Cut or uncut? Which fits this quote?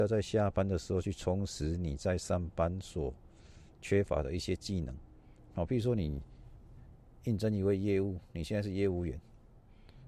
uncut